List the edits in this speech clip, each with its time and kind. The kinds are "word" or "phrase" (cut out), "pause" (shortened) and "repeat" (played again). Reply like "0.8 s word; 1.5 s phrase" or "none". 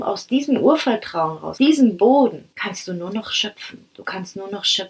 1.6 s word; 2.5 s pause